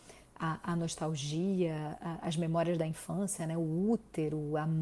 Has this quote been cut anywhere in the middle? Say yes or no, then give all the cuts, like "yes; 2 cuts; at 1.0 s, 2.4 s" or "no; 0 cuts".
no; 0 cuts